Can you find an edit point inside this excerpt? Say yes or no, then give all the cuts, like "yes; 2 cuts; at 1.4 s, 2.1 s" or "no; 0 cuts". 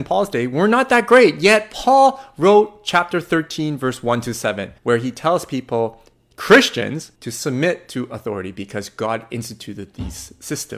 yes; 2 cuts; at 4.8 s, 7.2 s